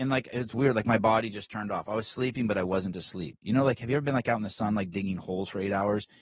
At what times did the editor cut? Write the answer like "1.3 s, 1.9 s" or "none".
none